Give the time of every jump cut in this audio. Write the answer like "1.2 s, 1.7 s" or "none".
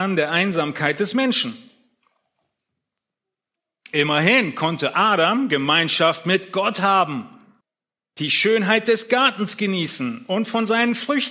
7.6 s